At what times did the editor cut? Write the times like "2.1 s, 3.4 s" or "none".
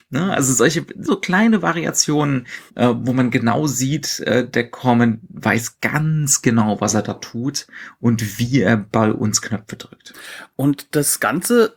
1.1 s